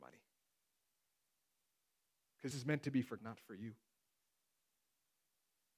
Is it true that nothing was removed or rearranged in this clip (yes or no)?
no